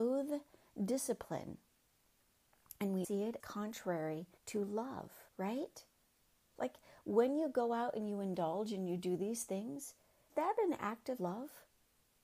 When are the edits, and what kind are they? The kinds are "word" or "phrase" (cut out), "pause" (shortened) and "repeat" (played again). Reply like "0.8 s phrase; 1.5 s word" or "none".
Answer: 3.0 s word; 3.4 s word; 4.4 s pause; 5.3 s pause; 10.3 s word; 11.2 s word